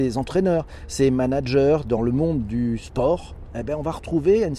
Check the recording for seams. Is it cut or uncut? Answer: uncut